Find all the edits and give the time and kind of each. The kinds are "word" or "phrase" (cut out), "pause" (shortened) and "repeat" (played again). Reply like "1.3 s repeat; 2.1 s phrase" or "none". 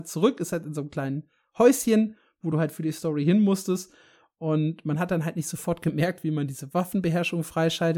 none